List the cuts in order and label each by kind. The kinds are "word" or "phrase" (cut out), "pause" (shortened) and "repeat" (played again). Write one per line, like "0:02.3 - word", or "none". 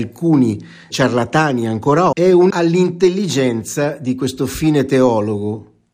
0:00.9 - word
0:02.1 - word
0:02.5 - word